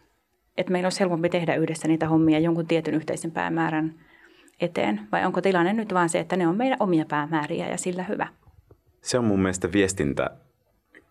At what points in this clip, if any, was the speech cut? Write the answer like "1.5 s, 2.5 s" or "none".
none